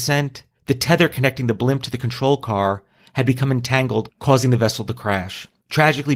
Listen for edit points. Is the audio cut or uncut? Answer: uncut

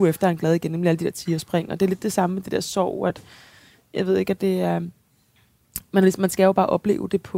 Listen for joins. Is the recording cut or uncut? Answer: uncut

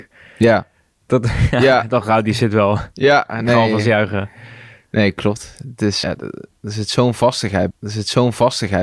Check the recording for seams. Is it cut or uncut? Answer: cut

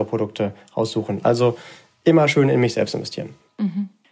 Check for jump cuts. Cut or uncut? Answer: uncut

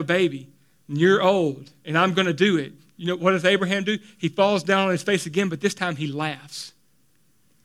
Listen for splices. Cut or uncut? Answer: uncut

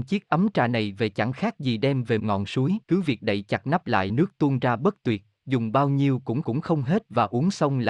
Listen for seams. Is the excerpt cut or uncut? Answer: cut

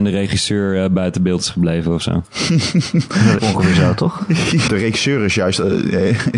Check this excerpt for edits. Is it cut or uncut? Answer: cut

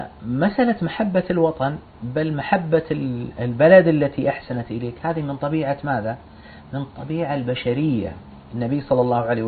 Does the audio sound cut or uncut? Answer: uncut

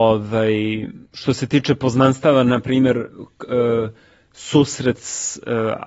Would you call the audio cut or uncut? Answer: cut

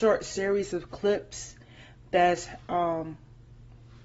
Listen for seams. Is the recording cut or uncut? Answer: uncut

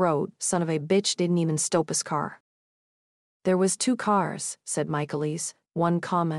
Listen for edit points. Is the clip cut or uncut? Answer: uncut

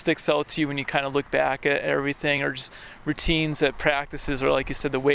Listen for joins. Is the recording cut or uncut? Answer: uncut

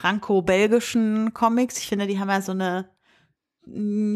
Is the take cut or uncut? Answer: uncut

